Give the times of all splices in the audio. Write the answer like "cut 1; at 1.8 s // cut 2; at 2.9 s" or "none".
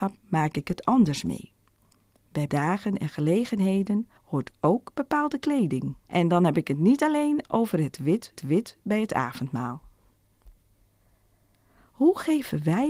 cut 1; at 2.5 s // cut 2; at 4.2 s // cut 3; at 6.0 s // cut 4; at 8.4 s